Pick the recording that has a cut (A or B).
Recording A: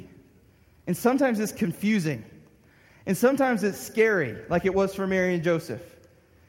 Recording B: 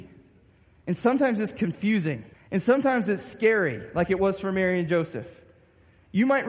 B